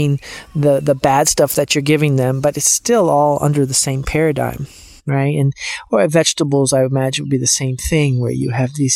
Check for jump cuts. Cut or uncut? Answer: uncut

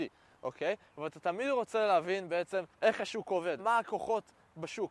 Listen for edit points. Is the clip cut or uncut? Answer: cut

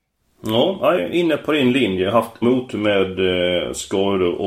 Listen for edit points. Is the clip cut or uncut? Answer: cut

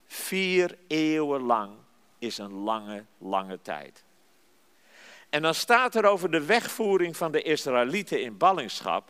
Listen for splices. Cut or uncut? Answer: uncut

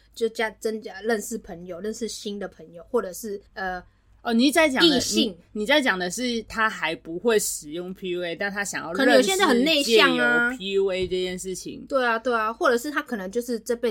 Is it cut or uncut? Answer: cut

